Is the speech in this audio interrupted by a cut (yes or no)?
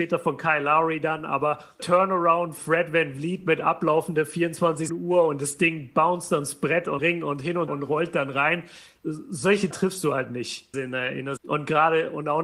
yes